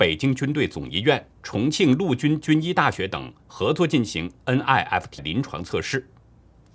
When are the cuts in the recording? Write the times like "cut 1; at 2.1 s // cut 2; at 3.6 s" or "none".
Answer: cut 1; at 1.3 s // cut 2; at 5.2 s